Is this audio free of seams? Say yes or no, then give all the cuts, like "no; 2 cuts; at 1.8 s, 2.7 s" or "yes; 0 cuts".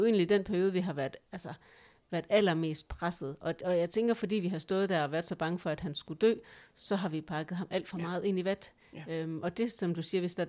yes; 0 cuts